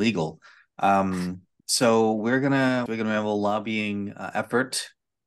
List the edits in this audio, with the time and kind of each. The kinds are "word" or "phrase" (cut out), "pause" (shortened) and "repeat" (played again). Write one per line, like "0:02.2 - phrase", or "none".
0:01.6 - pause
0:02.9 - phrase